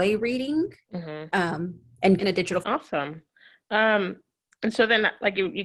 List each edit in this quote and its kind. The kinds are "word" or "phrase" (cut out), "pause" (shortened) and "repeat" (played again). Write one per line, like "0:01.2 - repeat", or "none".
0:02.2 - phrase
0:02.6 - phrase